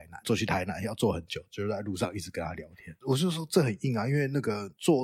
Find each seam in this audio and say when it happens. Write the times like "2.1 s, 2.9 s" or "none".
3.0 s